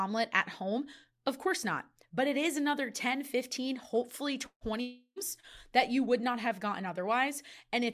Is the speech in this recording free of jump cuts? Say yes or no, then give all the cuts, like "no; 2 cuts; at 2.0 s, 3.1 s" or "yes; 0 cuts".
yes; 0 cuts